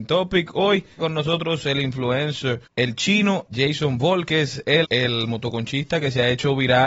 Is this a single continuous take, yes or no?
no